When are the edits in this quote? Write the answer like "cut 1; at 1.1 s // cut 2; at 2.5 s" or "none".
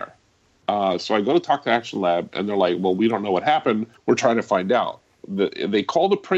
cut 1; at 4.0 s